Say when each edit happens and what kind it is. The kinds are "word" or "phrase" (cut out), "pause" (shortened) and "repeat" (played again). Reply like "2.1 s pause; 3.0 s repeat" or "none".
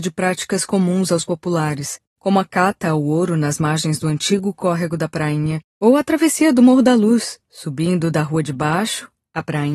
none